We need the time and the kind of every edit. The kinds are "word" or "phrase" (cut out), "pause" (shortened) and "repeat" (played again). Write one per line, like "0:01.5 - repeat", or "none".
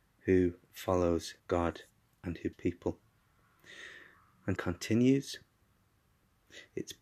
0:01.4 - pause
0:02.5 - phrase
0:04.6 - phrase